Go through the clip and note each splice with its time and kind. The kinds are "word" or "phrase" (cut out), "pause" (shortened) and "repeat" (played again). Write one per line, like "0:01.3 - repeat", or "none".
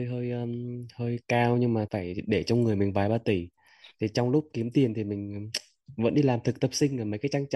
0:01.9 - word